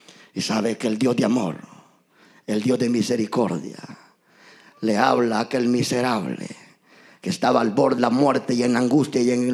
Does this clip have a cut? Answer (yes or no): yes